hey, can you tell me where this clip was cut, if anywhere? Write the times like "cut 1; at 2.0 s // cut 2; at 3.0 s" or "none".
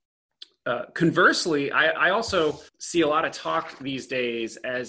cut 1; at 2.7 s